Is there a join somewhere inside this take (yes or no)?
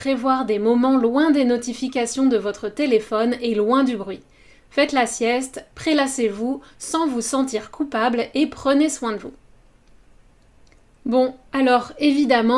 no